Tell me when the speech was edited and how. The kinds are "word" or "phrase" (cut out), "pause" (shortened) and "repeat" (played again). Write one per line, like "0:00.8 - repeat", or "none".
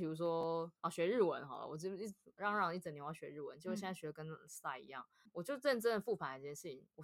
0:05.3 - word